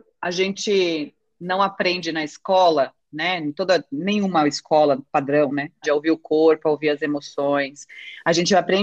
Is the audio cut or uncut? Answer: cut